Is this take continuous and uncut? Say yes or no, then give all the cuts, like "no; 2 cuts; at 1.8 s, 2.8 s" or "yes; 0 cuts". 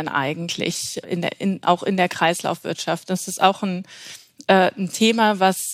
no; 1 cut; at 1.0 s